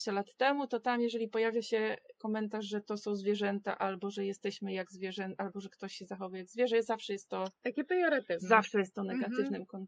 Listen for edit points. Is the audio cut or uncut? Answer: uncut